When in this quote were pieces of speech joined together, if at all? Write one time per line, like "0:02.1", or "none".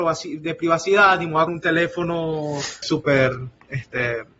0:01.5
0:02.8